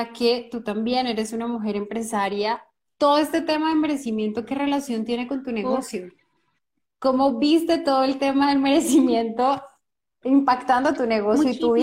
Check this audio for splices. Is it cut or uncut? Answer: uncut